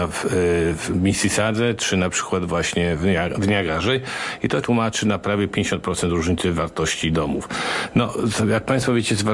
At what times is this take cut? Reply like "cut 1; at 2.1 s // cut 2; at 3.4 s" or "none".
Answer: cut 1; at 4.6 s